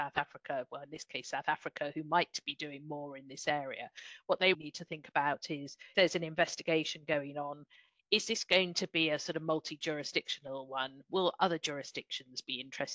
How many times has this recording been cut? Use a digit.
2